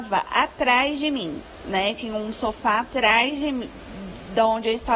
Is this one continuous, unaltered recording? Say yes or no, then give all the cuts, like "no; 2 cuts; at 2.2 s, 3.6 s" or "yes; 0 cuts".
yes; 0 cuts